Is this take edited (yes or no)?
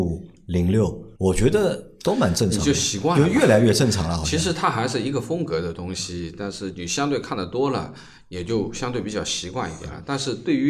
yes